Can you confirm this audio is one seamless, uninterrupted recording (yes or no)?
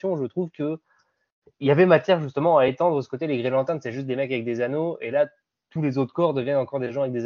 yes